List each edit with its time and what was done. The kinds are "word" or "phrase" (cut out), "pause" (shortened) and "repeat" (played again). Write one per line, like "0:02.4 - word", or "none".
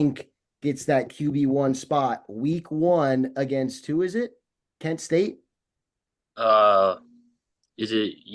0:04.6 - pause